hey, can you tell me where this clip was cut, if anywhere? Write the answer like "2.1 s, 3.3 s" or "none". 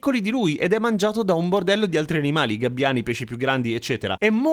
none

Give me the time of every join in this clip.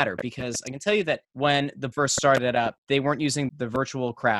1.2 s, 1.9 s, 2.8 s, 3.5 s

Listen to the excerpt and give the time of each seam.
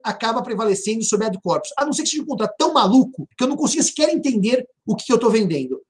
3.3 s

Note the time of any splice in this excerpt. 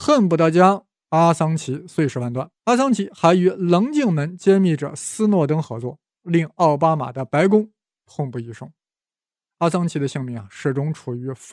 2.6 s

